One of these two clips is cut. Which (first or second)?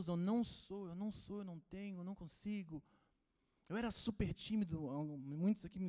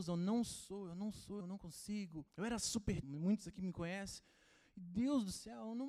second